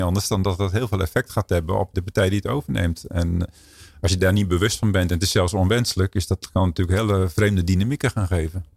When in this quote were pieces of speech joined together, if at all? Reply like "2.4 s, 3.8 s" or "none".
1.9 s